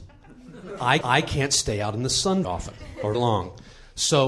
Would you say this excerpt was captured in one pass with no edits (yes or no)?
no